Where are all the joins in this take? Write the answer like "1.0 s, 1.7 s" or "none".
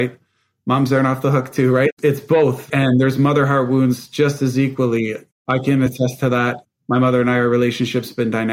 none